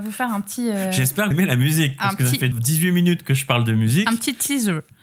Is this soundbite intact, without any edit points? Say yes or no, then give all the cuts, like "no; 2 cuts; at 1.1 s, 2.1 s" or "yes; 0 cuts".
no; 2 cuts; at 1.3 s, 2.5 s